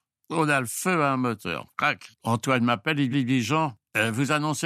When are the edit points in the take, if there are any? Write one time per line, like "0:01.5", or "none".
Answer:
0:02.1
0:03.1